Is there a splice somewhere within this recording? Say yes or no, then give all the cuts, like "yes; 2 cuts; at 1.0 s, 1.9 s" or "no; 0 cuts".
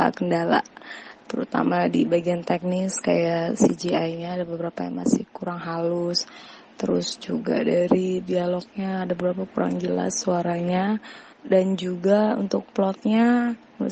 yes; 1 cut; at 11.3 s